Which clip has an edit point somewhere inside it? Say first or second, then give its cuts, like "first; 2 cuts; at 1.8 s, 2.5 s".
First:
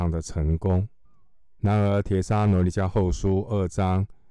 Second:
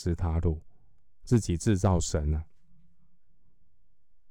first; 1 cut; at 1.0 s